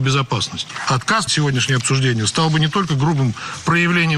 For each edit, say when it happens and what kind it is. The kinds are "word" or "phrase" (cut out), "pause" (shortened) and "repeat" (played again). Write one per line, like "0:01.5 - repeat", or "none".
0:01.3 - word